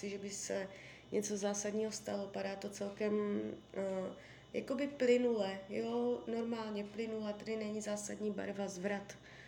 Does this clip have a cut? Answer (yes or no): no